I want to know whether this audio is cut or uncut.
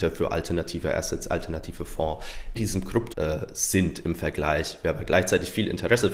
cut